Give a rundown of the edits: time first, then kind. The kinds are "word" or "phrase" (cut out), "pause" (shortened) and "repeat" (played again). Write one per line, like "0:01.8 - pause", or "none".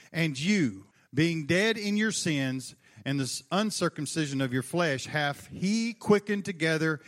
0:00.9 - pause